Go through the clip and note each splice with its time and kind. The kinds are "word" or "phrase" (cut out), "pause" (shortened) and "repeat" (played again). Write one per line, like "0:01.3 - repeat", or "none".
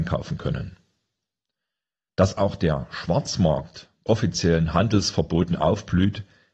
0:04.1 - word